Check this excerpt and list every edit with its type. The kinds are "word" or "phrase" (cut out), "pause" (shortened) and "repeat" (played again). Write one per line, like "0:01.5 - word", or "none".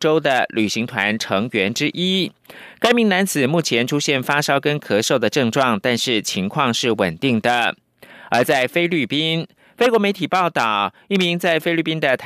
none